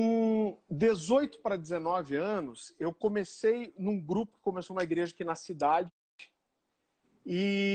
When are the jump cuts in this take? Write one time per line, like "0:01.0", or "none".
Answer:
none